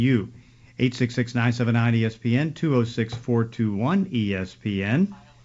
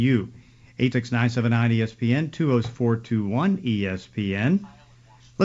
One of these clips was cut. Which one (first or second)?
second